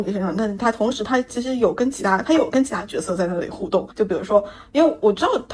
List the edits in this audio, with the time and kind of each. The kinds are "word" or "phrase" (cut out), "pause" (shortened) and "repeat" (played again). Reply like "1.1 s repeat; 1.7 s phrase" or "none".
3.9 s pause